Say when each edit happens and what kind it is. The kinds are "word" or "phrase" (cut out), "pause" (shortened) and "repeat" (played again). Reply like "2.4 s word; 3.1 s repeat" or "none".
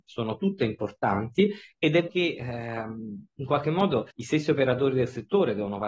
2.1 s word; 4.1 s pause